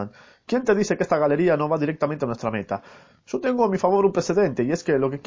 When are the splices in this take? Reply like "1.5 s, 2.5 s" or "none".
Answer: none